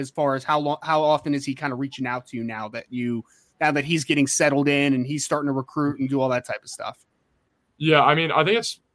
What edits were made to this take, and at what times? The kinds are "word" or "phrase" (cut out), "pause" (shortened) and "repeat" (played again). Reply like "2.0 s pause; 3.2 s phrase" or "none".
none